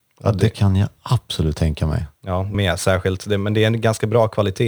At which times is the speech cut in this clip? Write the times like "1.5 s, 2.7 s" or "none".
2.5 s